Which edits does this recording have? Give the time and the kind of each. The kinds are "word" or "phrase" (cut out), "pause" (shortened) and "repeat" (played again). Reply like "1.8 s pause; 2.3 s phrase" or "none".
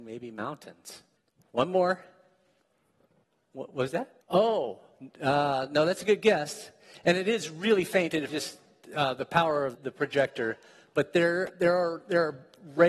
1.2 s pause; 4.2 s pause; 8.3 s word; 9.7 s word